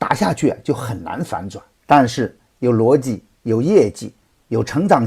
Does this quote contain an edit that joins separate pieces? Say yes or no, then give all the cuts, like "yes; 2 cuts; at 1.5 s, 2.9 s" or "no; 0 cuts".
yes; 1 cut; at 1.7 s